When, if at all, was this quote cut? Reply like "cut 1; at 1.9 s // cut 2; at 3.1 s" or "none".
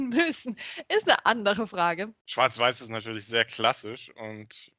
cut 1; at 2.2 s